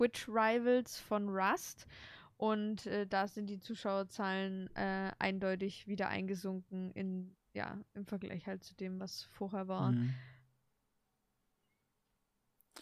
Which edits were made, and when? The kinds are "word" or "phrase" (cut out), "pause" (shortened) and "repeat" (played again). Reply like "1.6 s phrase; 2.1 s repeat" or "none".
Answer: none